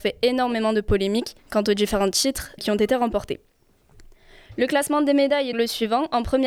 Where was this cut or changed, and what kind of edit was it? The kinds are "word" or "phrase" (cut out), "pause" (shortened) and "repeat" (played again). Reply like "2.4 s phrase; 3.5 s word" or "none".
1.4 s pause; 2.6 s word; 5.5 s word